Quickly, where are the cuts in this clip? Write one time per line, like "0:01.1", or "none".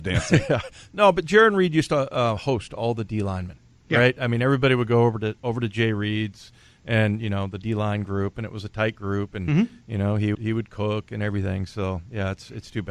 0:10.3